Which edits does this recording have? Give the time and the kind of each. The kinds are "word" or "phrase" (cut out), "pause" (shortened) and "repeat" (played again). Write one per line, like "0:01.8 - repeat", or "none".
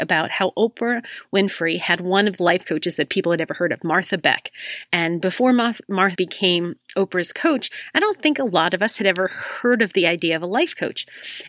0:02.4 - word
0:06.2 - word